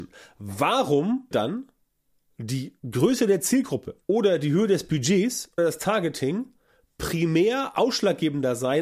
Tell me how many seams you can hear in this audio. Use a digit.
4